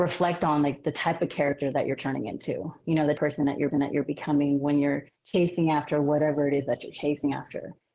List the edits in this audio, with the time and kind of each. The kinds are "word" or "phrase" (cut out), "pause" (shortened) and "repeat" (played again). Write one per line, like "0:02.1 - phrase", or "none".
0:03.2 - phrase
0:03.7 - repeat
0:05.2 - pause